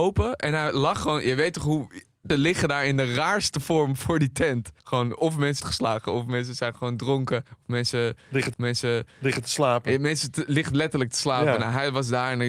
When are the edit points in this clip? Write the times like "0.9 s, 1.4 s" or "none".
2.3 s, 4.8 s, 5.6 s, 7.5 s, 8.5 s